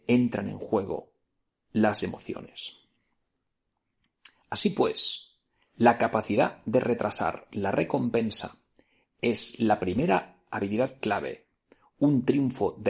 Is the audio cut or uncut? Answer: uncut